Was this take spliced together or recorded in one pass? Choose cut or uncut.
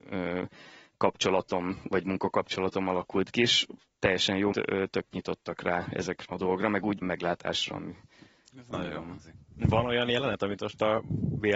cut